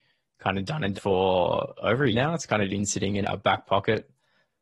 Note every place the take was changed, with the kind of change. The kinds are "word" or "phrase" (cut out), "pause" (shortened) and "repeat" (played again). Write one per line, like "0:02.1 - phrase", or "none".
0:00.9 - word
0:02.1 - word
0:02.7 - word
0:03.2 - word